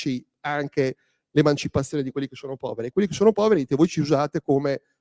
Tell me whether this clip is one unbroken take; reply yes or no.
yes